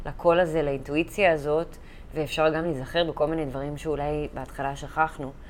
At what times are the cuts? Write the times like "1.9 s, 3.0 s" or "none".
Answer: none